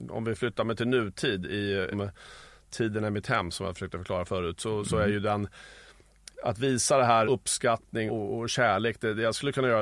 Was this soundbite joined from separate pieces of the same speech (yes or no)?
yes